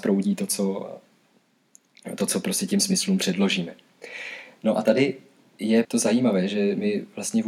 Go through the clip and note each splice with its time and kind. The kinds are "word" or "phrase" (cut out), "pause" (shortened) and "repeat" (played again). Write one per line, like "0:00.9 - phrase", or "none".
0:05.8 - word